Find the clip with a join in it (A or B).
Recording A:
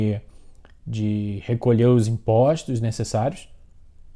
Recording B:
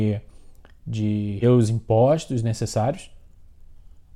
B